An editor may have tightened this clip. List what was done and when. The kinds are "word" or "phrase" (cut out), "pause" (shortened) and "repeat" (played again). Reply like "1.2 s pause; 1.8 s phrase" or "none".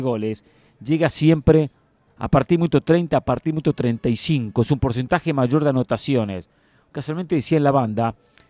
none